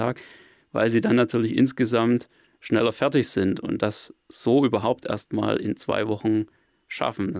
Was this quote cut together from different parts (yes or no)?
no